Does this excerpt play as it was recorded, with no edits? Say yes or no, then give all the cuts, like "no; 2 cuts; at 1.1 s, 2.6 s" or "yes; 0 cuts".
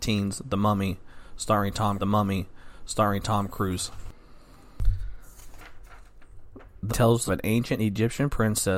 no; 3 cuts; at 2.0 s, 6.9 s, 7.3 s